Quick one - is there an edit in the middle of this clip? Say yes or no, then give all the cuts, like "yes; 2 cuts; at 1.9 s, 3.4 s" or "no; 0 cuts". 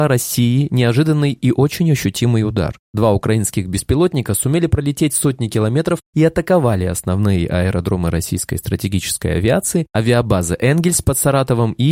no; 0 cuts